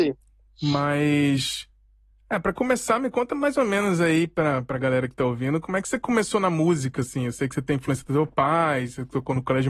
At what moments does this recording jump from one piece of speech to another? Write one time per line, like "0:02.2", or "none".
none